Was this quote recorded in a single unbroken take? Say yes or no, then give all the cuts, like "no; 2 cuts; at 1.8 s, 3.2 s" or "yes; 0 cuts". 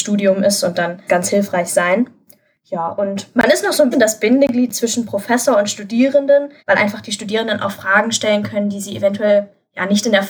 no; 3 cuts; at 1.1 s, 3.9 s, 6.6 s